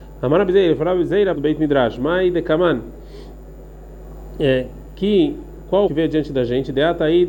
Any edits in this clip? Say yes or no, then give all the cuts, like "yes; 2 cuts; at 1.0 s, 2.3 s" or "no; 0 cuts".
yes; 2 cuts; at 1.3 s, 5.9 s